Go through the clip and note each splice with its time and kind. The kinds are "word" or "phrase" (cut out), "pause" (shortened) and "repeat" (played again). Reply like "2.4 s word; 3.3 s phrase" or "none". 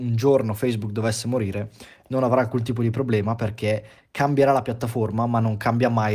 none